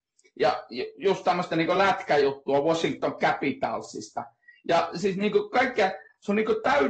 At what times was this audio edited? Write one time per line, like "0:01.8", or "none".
none